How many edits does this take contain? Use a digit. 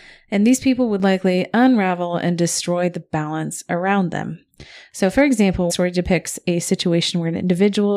1